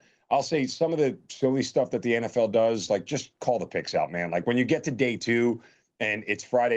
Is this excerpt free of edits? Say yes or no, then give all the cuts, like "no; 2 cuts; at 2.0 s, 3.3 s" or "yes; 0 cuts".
yes; 0 cuts